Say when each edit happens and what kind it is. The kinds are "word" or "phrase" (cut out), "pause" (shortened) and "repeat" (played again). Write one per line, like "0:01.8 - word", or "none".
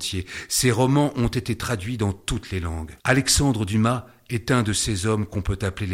0:03.0 - pause